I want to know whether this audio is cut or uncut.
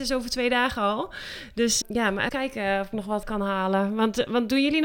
cut